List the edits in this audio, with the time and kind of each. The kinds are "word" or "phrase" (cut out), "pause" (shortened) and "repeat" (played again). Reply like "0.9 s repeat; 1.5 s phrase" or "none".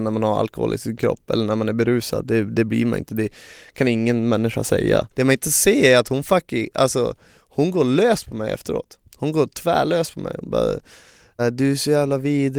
5.1 s pause; 9.1 s pause; 11.4 s word